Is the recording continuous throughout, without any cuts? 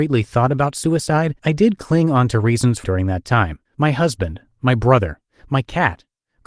no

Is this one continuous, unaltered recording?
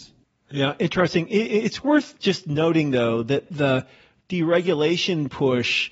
yes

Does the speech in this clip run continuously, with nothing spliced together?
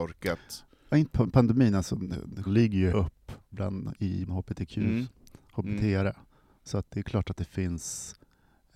no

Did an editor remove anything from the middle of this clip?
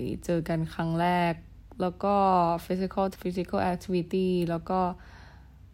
yes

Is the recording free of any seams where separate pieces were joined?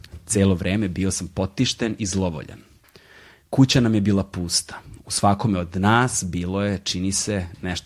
yes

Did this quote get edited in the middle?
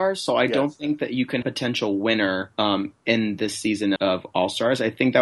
yes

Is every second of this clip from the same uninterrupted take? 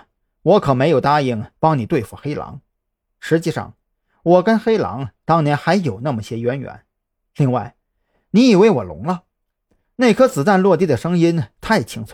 yes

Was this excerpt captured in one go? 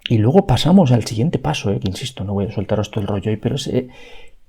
yes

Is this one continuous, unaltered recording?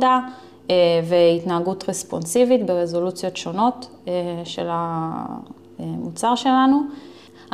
yes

